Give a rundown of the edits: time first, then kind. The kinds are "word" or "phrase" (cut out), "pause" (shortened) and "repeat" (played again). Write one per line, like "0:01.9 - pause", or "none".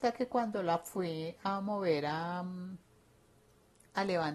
none